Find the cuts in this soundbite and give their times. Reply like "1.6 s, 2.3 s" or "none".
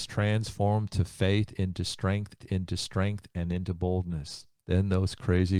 2.4 s, 4.6 s